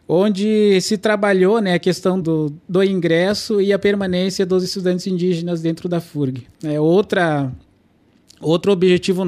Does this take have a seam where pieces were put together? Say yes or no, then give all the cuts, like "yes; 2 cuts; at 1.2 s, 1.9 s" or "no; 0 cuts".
yes; 2 cuts; at 2.2 s, 6.5 s